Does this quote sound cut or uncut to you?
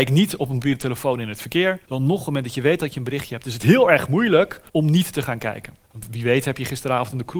cut